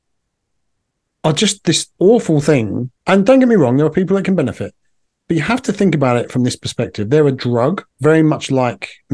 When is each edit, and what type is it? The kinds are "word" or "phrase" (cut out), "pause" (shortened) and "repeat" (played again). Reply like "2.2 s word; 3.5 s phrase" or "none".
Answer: 1.9 s pause; 3.0 s pause; 7.9 s pause